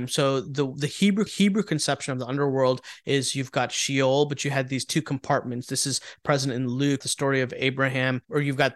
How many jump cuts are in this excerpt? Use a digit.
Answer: 2